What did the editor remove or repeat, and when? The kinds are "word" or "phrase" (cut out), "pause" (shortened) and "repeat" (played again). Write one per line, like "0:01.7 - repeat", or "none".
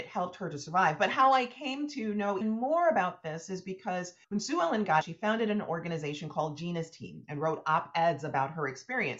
0:02.4 - word
0:04.2 - pause
0:05.0 - word